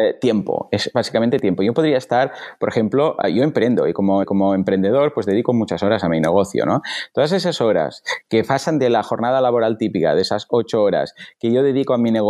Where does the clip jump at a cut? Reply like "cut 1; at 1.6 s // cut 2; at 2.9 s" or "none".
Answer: cut 1; at 4.2 s